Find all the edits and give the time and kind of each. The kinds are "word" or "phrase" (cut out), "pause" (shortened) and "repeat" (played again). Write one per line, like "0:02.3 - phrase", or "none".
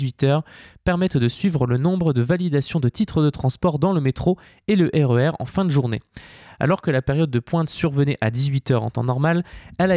none